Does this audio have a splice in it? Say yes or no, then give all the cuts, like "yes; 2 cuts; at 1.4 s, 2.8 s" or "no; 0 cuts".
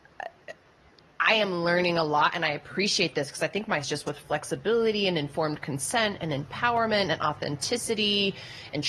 yes; 1 cut; at 3.8 s